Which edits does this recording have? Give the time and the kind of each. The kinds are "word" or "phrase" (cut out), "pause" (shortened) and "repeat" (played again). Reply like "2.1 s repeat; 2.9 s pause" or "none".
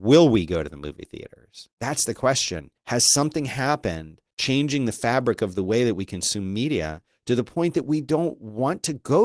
1.7 s pause; 2.8 s pause; 4.3 s pause